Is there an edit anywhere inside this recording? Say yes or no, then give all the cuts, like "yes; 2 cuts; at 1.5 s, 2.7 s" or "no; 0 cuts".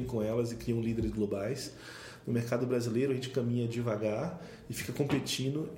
no; 0 cuts